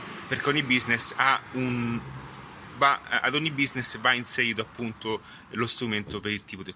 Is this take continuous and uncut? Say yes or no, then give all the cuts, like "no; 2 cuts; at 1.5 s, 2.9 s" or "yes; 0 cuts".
yes; 0 cuts